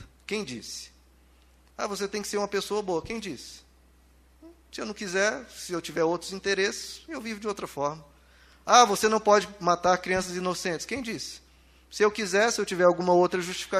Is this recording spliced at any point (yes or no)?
no